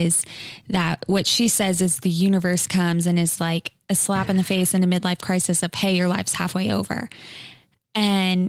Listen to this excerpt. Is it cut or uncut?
uncut